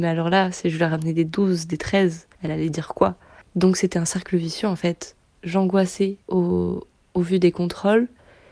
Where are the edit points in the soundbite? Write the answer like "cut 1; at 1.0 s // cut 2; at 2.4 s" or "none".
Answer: cut 1; at 2.3 s // cut 2; at 3.4 s // cut 3; at 6.2 s